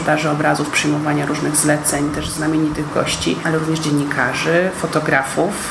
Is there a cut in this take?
no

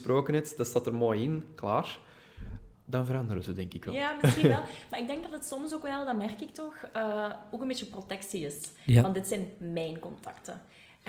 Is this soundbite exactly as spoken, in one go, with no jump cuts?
no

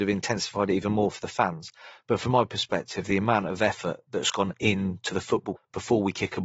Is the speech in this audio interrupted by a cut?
yes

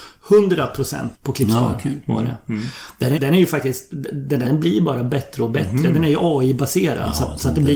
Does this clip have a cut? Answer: yes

